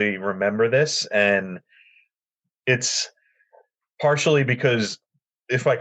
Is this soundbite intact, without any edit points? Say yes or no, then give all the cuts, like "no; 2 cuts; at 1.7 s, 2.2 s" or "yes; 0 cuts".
yes; 0 cuts